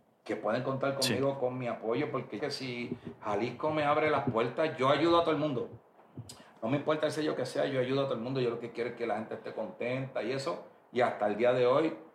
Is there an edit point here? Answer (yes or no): yes